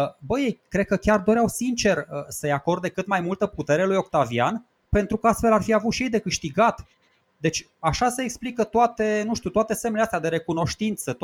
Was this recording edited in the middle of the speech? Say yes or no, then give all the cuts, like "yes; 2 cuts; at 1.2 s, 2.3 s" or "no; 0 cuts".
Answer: no; 0 cuts